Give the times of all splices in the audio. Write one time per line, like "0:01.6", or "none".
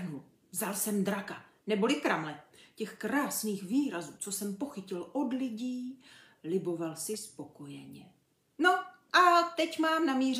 none